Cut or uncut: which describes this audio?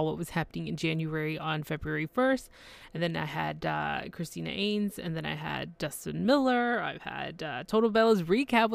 uncut